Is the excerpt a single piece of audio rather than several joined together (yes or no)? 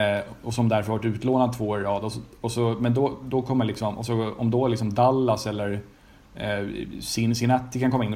yes